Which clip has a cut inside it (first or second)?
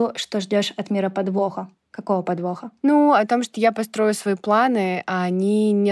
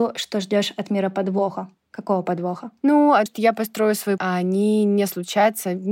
second